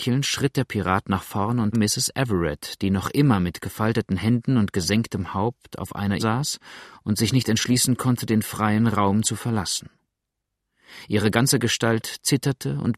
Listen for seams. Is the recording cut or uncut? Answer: cut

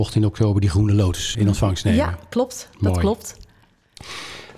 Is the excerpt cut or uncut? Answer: cut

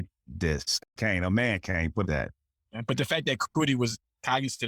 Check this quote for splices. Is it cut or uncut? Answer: cut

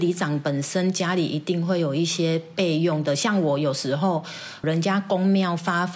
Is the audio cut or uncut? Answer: cut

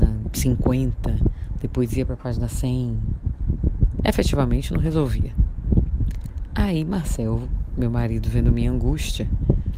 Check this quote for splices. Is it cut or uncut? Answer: uncut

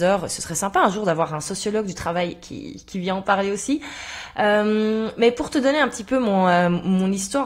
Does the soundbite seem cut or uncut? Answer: uncut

